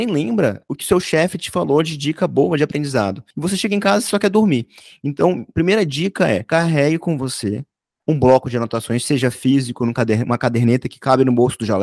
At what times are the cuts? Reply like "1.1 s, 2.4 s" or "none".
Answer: 3.3 s